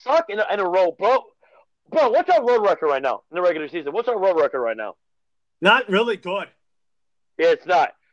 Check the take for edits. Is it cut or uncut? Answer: uncut